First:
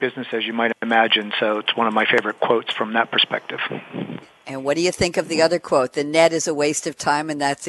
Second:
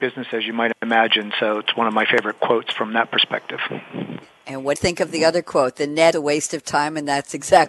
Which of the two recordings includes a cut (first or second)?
second